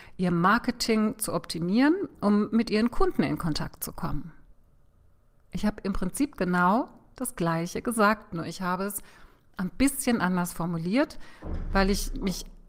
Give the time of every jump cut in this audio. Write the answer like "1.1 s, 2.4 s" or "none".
none